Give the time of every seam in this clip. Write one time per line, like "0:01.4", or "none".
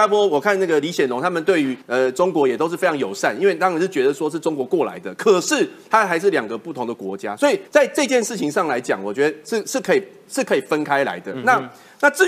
0:01.8
0:07.7